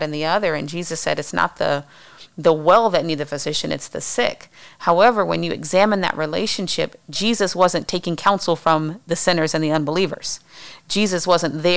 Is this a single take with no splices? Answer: yes; 0 cuts

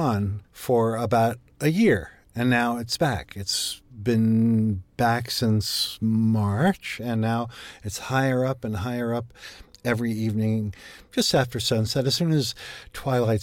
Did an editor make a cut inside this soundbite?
no; 0 cuts

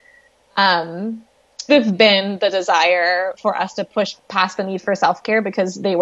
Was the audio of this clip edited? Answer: yes; 2 cuts; at 1.7 s, 4.2 s

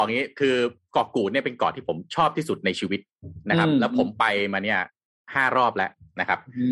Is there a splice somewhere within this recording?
no; 0 cuts

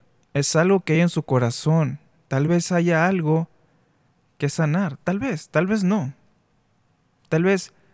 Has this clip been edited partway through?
no; 0 cuts

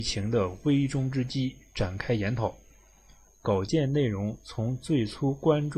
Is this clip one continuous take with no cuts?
yes; 0 cuts

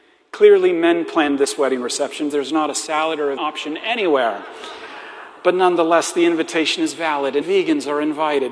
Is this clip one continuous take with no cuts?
no; 3 cuts; at 2.3 s, 3.4 s, 7.4 s

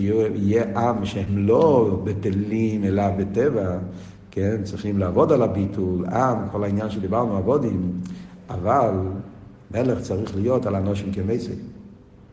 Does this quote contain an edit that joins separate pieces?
no; 0 cuts

